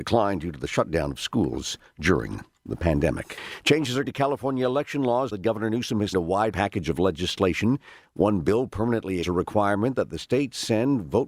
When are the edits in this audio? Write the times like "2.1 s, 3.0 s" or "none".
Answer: 4.1 s, 5.3 s, 6.1 s, 6.5 s, 9.2 s